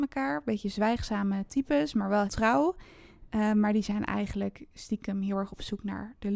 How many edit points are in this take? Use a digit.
1